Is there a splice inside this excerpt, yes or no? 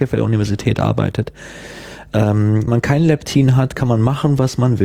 yes